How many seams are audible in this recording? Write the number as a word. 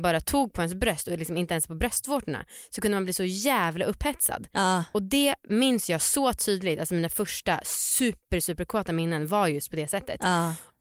zero